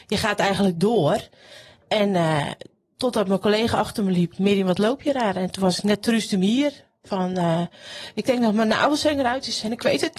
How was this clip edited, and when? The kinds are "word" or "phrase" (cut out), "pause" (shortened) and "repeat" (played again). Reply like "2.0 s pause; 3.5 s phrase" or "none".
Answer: none